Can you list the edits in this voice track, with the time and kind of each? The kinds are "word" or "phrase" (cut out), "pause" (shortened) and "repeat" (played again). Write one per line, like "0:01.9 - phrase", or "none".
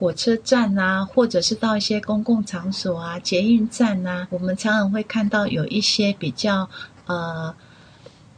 0:04.3 - word